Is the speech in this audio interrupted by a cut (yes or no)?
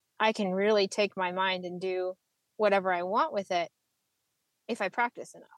no